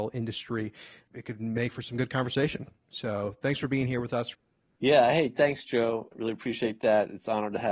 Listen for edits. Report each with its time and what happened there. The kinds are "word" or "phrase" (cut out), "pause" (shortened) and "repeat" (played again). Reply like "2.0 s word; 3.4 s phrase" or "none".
none